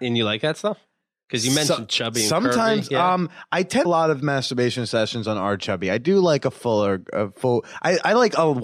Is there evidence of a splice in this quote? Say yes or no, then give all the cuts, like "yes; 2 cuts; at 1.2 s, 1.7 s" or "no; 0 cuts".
yes; 1 cut; at 3.8 s